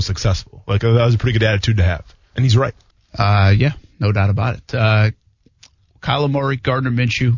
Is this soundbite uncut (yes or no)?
no